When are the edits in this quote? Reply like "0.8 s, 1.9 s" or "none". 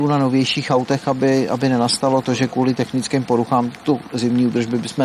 none